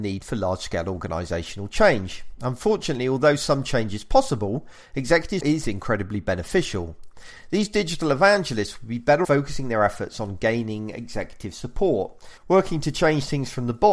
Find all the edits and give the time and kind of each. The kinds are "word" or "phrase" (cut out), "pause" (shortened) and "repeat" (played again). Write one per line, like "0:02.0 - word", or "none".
0:05.4 - word
0:09.2 - word
0:12.4 - pause